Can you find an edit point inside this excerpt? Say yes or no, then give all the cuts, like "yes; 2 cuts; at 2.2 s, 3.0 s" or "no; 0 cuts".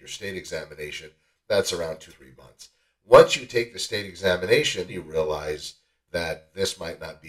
yes; 2 cuts; at 2.1 s, 4.9 s